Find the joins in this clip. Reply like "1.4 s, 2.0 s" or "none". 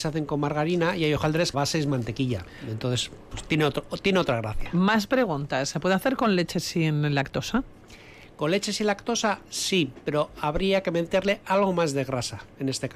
1.5 s